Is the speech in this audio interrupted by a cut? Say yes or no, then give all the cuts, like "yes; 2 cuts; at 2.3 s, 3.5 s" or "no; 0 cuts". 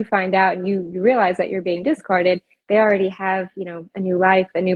no; 0 cuts